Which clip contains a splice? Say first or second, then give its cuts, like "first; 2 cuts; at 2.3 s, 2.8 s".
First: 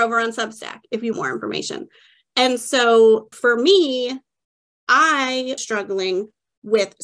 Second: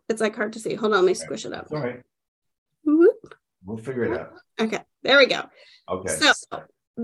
first; 3 cuts; at 1.1 s, 3.3 s, 5.6 s